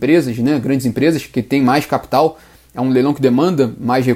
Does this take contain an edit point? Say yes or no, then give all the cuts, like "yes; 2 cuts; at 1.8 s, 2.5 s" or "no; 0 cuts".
no; 0 cuts